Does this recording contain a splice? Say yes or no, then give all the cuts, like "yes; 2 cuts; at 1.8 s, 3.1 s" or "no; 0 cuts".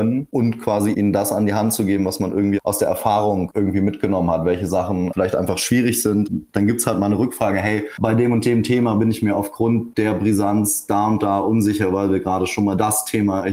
no; 0 cuts